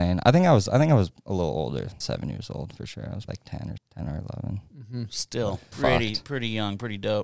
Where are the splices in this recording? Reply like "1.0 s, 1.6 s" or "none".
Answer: 2.0 s, 3.3 s, 3.8 s, 5.7 s